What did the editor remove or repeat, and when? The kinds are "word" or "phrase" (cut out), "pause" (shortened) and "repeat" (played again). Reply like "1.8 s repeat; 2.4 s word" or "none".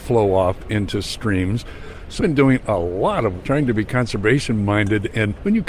2.2 s word; 3.4 s word